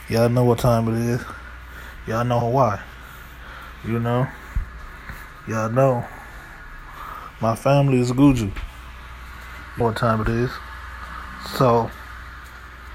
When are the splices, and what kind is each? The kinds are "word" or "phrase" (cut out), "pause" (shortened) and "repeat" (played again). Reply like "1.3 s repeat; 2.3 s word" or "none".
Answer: 2.4 s word; 9.8 s word